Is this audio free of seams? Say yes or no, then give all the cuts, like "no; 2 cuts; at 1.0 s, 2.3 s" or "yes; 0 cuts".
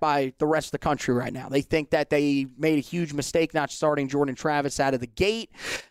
yes; 0 cuts